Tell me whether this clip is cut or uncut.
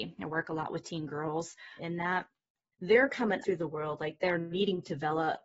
cut